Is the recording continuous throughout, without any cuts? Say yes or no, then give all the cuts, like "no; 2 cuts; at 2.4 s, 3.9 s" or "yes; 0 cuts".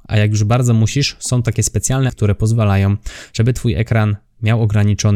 no; 1 cut; at 2.1 s